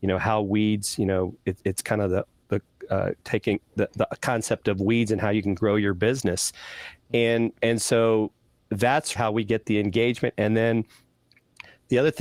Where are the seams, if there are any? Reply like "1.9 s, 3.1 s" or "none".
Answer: 9.2 s